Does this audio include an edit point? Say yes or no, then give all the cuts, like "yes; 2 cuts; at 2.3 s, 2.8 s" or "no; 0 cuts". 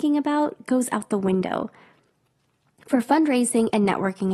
no; 0 cuts